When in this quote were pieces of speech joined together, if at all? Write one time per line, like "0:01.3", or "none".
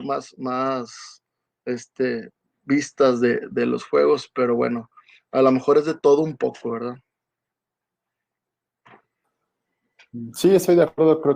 none

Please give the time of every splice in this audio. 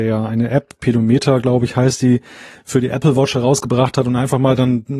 none

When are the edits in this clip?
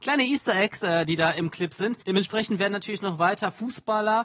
0:02.0

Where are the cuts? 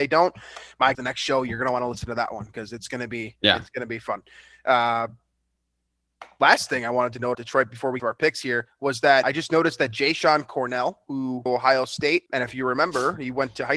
0:00.9
0:07.3
0:08.0
0:09.2
0:11.5
0:12.3

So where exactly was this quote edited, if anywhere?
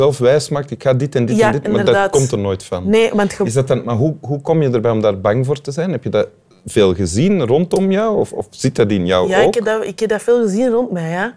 none

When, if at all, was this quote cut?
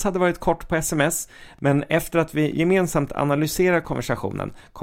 none

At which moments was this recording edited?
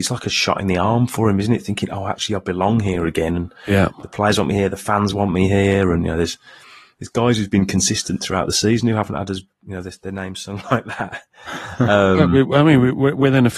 none

